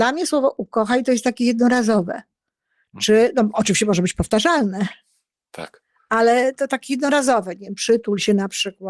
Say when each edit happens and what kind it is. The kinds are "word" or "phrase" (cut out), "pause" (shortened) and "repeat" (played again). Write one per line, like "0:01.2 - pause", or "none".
none